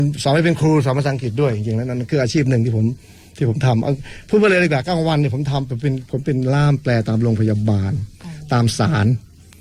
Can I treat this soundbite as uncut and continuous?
yes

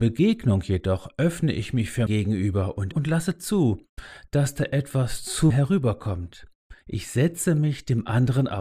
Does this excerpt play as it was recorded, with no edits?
no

